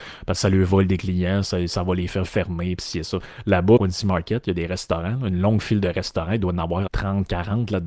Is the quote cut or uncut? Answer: cut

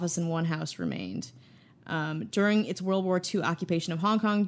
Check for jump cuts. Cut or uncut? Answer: uncut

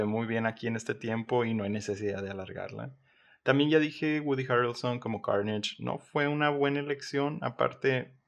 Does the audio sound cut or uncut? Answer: uncut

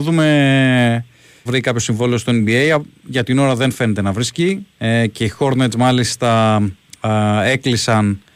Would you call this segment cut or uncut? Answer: cut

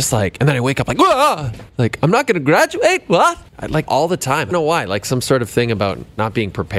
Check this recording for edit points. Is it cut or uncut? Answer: cut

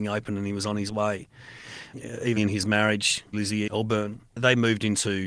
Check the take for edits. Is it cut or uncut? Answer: cut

